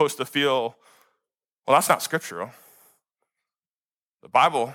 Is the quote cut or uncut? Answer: uncut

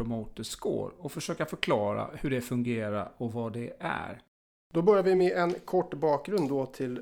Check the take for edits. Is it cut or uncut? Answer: uncut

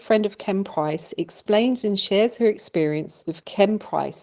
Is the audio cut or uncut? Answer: uncut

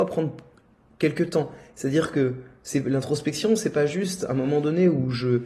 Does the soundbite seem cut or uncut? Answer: uncut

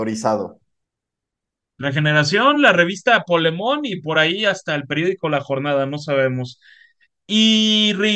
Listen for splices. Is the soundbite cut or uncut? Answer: uncut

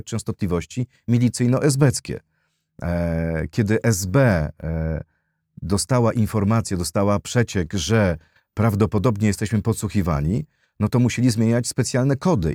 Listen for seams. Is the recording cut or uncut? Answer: uncut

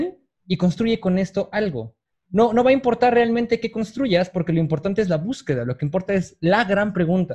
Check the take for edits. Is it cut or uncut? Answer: uncut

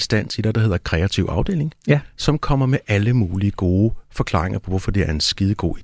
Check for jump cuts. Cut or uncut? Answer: uncut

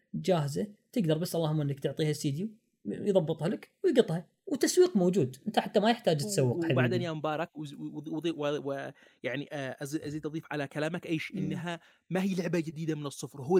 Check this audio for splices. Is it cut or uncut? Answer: uncut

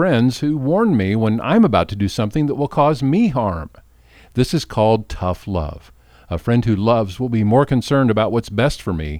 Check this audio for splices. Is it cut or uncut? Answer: uncut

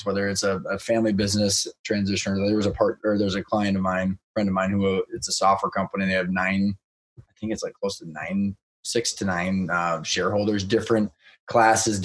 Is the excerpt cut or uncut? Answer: uncut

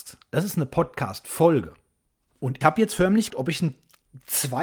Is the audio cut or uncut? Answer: cut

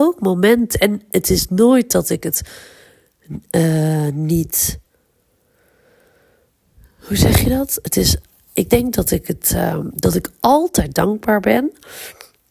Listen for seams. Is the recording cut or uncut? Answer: uncut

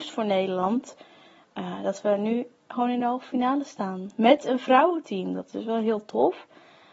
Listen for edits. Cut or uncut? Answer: uncut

